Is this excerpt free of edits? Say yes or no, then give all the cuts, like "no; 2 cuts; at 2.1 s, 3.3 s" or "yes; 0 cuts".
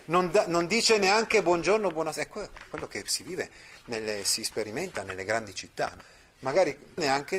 yes; 0 cuts